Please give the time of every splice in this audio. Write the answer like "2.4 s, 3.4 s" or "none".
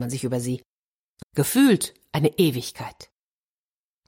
1.2 s